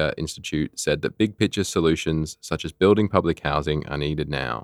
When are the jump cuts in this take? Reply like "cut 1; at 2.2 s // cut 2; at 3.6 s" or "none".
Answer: none